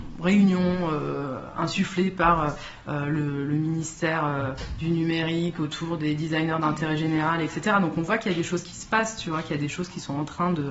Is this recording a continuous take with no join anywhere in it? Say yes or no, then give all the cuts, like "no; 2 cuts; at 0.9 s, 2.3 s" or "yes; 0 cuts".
yes; 0 cuts